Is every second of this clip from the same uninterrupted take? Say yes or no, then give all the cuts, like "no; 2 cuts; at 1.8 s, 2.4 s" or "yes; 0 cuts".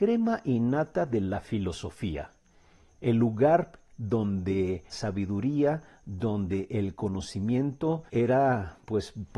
no; 2 cuts; at 4.9 s, 8.1 s